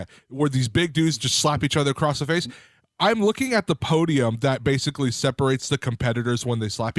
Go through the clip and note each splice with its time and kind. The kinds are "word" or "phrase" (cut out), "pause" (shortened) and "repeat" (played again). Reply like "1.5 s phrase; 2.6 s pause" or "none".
none